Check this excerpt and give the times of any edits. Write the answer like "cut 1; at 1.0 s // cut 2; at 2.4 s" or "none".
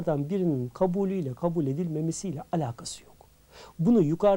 none